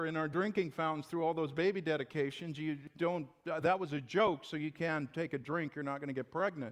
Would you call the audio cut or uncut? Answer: uncut